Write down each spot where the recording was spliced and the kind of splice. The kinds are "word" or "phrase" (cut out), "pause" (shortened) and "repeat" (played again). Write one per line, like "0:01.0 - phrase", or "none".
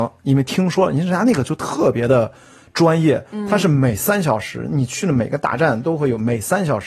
none